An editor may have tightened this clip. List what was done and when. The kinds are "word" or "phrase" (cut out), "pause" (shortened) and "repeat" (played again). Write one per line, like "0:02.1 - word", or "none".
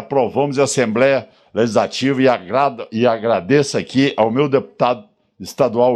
none